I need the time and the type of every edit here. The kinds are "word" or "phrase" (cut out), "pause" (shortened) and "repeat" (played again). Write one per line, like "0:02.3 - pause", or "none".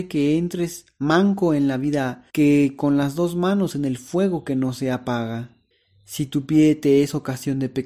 0:02.3 - pause
0:05.7 - pause